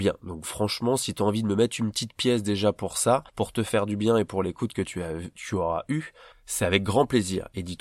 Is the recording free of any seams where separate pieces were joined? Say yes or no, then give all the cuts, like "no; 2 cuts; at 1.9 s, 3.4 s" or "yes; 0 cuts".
no; 2 cuts; at 3.3 s, 6.3 s